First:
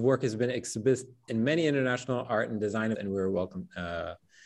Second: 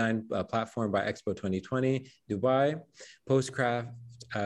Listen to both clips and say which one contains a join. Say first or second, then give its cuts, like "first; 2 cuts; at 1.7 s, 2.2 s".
first; 2 cuts; at 1.3 s, 2.9 s